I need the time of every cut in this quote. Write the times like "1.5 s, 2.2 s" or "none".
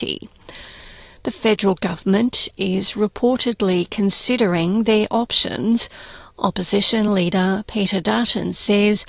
none